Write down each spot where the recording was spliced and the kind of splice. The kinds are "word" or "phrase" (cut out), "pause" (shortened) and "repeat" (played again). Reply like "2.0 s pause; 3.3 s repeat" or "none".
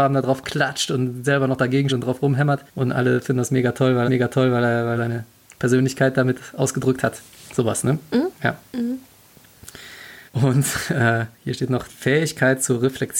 1.9 s word; 2.7 s pause; 4.1 s repeat; 5.0 s word; 8.3 s pause; 10.3 s pause; 11.3 s pause; 11.9 s word